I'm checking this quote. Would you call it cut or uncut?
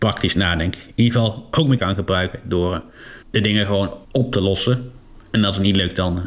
cut